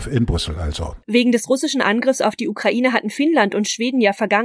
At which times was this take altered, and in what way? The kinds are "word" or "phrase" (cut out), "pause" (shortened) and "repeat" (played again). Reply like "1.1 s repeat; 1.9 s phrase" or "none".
1.0 s pause